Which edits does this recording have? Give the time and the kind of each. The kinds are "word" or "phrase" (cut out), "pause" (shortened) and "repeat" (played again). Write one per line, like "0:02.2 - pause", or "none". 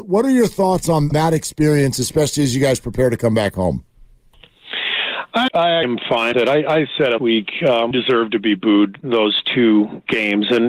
0:01.1 - word
0:05.5 - word
0:05.8 - word
0:06.3 - word
0:07.2 - word
0:07.9 - word